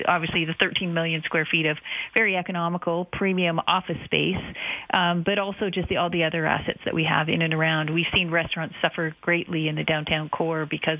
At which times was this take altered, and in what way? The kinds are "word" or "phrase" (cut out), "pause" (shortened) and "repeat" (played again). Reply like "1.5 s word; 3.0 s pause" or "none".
none

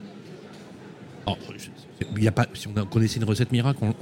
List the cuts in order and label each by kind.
none

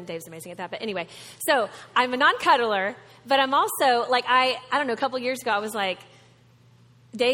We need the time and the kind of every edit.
none

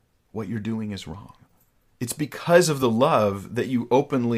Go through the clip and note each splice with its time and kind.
none

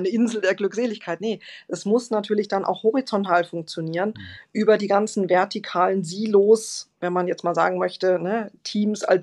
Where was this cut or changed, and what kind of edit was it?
none

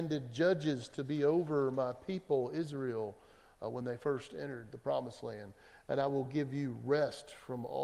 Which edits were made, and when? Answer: none

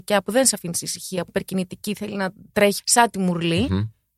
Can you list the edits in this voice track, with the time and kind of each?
1.3 s word; 2.8 s phrase

